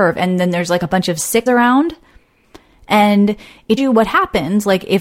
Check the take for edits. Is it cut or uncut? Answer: cut